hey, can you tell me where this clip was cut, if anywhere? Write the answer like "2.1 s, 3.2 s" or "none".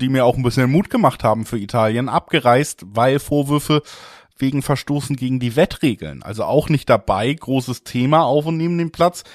none

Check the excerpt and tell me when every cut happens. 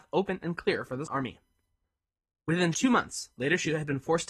1.1 s, 2.7 s

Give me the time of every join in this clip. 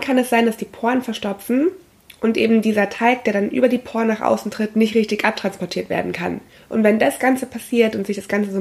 none

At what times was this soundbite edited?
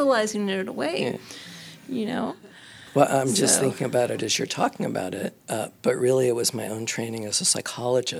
5.4 s

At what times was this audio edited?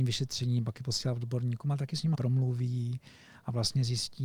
2.1 s

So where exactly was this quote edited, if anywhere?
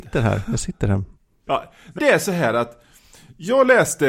1.5 s, 2.0 s

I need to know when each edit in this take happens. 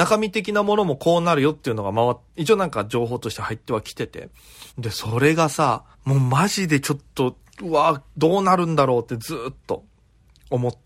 2.3 s, 4.7 s, 5.9 s

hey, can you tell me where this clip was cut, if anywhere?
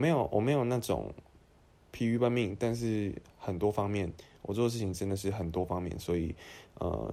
none

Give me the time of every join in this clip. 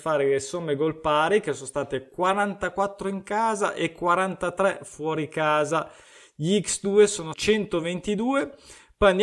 7.3 s

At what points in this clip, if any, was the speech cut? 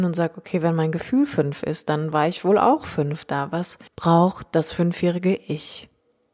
3.9 s

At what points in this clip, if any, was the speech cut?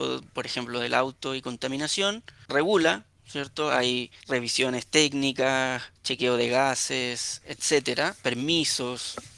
2.5 s, 4.2 s, 6.0 s

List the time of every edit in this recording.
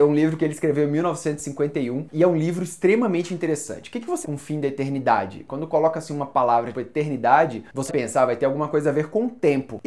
4.2 s, 6.7 s, 7.9 s

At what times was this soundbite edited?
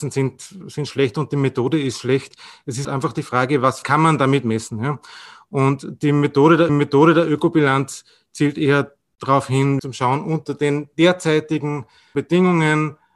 2.8 s, 3.8 s, 6.7 s, 9.8 s

